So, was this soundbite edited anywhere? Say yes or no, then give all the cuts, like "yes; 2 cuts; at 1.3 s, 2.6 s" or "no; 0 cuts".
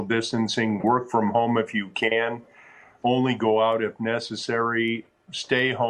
no; 0 cuts